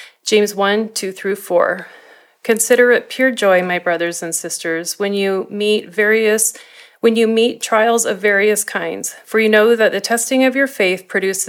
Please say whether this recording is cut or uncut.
uncut